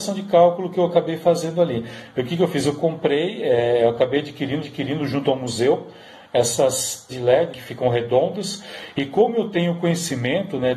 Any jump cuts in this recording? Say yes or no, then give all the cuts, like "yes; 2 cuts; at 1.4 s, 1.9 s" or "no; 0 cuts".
yes; 3 cuts; at 4.6 s, 7.1 s, 7.5 s